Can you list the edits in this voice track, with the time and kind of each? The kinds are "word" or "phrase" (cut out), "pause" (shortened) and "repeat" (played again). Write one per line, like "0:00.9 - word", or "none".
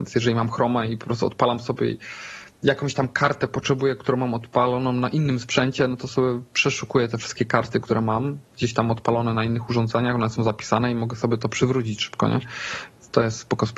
0:08.5 - pause